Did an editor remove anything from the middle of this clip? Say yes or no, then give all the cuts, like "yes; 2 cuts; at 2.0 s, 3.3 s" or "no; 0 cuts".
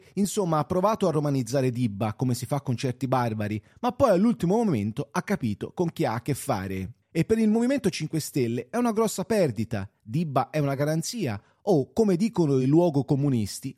no; 0 cuts